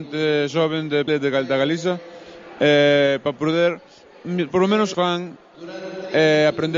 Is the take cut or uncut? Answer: cut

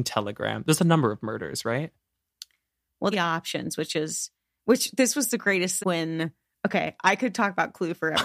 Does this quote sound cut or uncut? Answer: cut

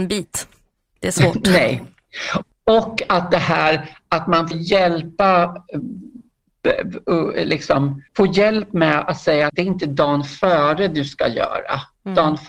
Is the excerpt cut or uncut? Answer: cut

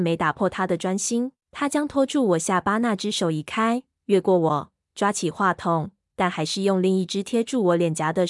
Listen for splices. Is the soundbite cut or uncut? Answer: cut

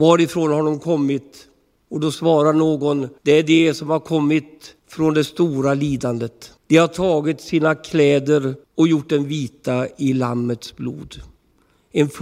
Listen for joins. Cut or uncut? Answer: cut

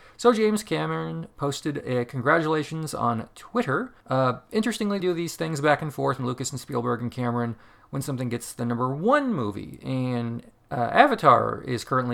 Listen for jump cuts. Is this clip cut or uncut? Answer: cut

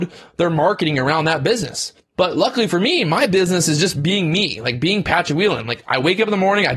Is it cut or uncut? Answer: cut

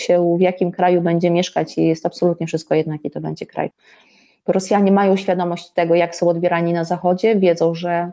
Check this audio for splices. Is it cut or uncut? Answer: uncut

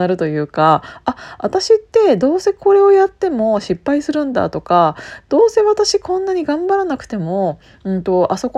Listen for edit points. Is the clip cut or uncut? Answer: uncut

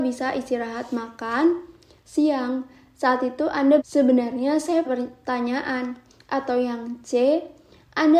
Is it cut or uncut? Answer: cut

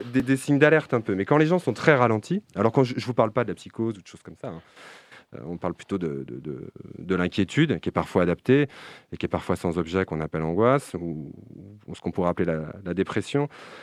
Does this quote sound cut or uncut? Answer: uncut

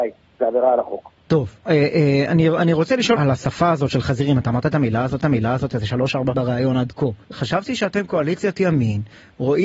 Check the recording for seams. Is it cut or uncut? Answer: cut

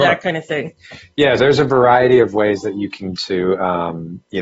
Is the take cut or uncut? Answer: cut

